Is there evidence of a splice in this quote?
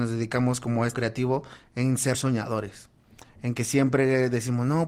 yes; 2 cuts; at 0.9 s, 2.1 s

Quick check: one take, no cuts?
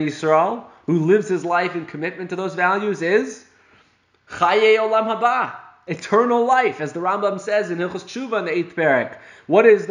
yes; 0 cuts

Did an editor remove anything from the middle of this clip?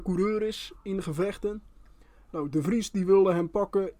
no; 0 cuts

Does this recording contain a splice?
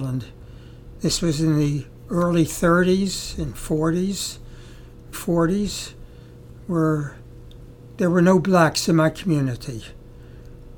yes; 1 cut; at 5.1 s

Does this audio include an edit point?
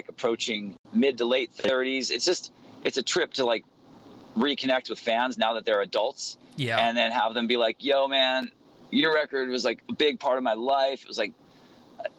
no; 0 cuts

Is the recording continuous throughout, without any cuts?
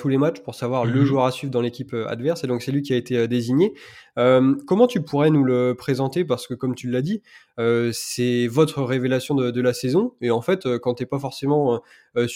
yes; 0 cuts

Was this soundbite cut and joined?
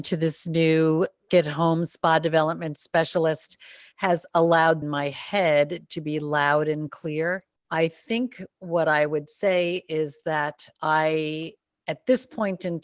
yes; 3 cuts; at 1.3 s, 4.8 s, 10.7 s

